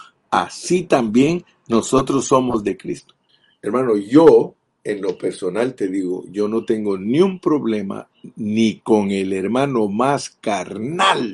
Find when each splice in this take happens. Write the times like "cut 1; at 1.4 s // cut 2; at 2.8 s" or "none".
cut 1; at 3.3 s